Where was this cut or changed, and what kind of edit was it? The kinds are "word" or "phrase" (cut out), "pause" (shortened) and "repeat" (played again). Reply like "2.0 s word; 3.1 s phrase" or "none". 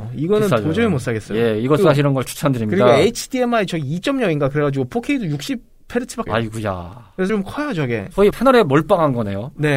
1.8 s phrase; 6.3 s phrase; 7.3 s word; 8.3 s word